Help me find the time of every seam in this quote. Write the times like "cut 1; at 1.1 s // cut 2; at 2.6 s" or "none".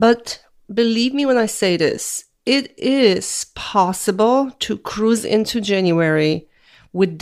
none